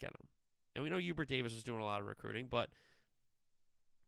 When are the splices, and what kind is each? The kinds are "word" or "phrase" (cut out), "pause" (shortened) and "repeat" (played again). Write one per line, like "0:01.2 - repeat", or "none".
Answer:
none

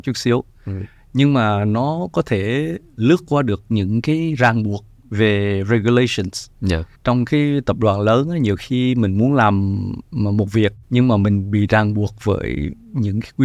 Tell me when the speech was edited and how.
0:07.0 - pause
0:10.8 - pause

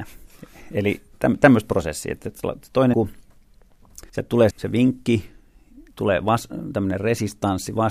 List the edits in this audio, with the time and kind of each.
0:02.9 - word
0:04.1 - pause
0:04.5 - word

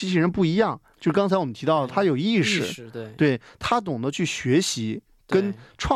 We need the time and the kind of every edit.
none

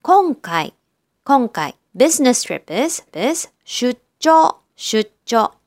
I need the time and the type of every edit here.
0:01.8 - pause
0:03.1 - repeat
0:04.7 - pause

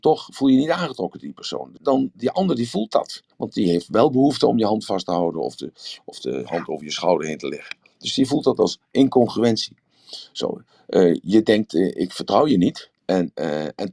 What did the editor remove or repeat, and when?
0:01.8 - word
0:03.3 - pause
0:13.0 - pause

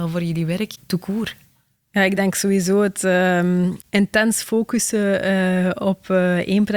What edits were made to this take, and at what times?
none

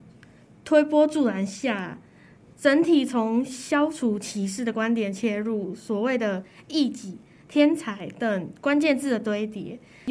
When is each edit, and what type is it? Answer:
none

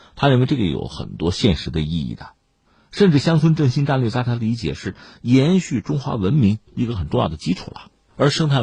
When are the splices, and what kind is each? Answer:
none

